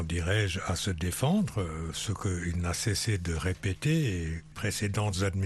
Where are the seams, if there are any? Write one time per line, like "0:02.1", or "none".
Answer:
0:04.5